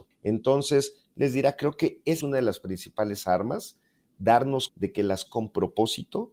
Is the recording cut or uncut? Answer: cut